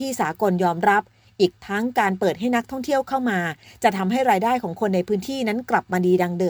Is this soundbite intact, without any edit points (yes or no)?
yes